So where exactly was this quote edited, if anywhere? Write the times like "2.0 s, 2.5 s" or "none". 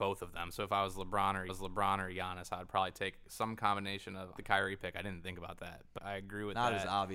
1.5 s, 4.4 s, 6.0 s

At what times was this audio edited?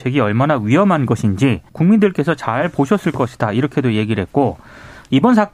1.7 s

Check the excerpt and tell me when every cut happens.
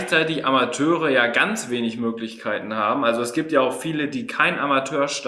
none

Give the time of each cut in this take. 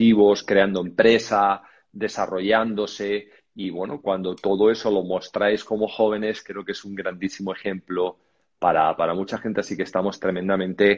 none

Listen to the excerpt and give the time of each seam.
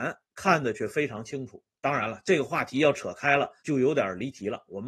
3.6 s

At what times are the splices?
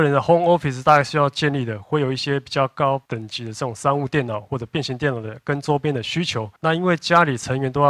3.1 s, 6.6 s

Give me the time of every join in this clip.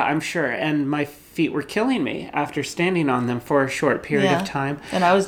none

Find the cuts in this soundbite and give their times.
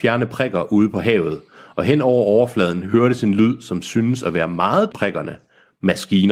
4.9 s

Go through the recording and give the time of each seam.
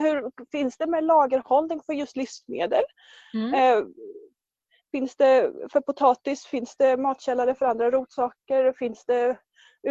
none

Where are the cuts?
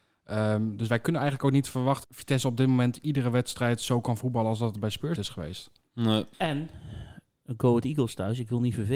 2.0 s, 5.2 s, 6.3 s

